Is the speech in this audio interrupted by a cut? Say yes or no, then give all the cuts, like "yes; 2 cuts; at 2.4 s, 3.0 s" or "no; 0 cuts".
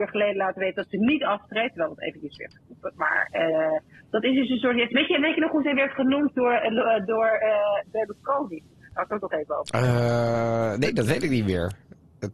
no; 0 cuts